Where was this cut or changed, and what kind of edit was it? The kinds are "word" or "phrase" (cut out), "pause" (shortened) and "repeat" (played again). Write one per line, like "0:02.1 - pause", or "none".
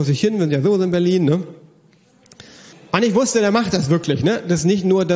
0:02.7 - pause